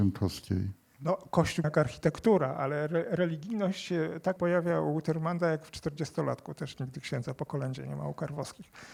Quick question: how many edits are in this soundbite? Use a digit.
2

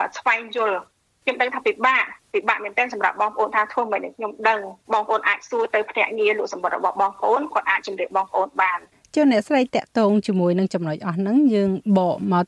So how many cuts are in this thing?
2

